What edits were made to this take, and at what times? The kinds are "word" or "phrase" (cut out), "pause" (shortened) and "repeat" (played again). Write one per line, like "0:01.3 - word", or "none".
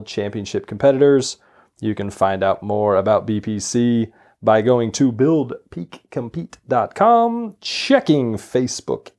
none

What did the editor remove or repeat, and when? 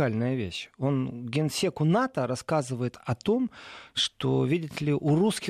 none

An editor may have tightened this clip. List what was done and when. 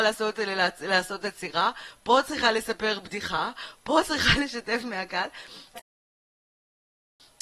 none

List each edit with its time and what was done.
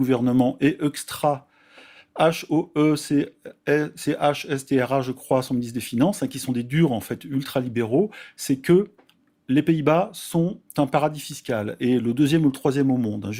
none

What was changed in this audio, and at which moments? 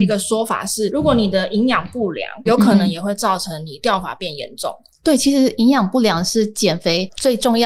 0:02.5 - word

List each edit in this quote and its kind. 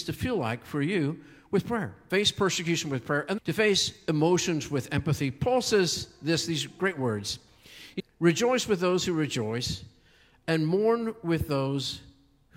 0:03.4 - word
0:08.0 - word

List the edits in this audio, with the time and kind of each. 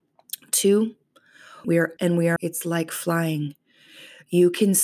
0:01.6 - word
0:02.0 - word
0:02.4 - word

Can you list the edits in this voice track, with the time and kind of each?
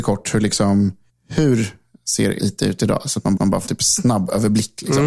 0:01.1 - pause
0:02.4 - word
0:03.4 - repeat
0:03.7 - word

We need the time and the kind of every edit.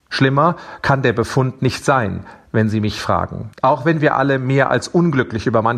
0:03.5 - pause

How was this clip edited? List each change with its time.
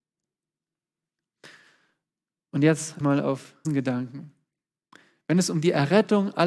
0:03.0 - word
0:03.6 - word

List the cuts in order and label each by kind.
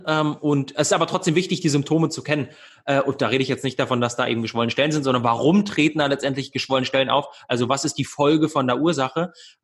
none

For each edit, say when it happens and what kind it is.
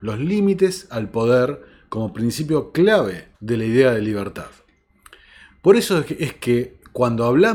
0:03.3 - pause

